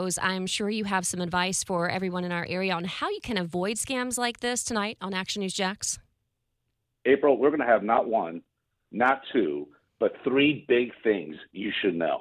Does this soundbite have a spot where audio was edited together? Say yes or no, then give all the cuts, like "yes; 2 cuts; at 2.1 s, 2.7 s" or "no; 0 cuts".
no; 0 cuts